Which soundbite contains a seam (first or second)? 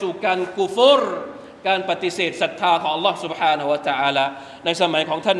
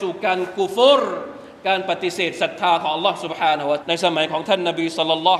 second